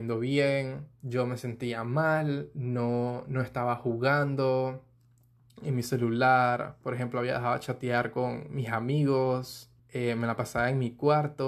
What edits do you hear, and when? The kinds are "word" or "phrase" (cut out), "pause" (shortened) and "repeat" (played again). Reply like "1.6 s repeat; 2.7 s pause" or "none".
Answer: 9.8 s pause